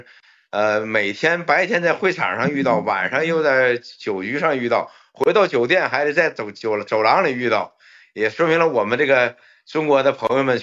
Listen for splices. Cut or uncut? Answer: uncut